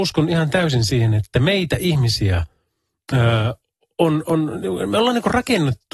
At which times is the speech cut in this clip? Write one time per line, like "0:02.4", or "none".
none